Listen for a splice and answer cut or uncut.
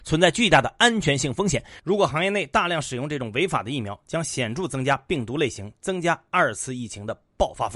uncut